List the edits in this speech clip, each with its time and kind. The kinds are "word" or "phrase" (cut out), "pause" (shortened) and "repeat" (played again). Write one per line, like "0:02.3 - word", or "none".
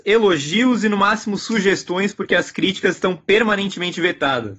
none